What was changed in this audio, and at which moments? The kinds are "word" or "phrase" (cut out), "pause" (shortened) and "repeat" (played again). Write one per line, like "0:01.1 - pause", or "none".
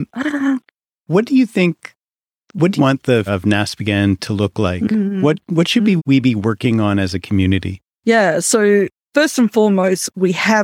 0:02.8 - word
0:03.3 - word
0:06.0 - word